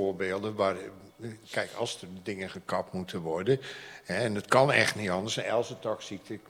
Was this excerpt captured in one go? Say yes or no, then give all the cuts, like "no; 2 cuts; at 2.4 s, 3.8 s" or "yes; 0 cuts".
yes; 0 cuts